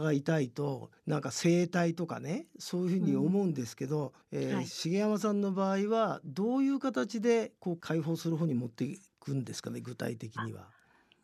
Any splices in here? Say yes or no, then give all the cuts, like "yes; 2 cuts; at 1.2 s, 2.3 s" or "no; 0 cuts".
yes; 2 cuts; at 1.0 s, 4.2 s